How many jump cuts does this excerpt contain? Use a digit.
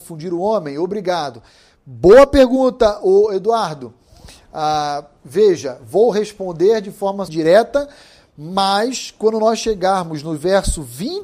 1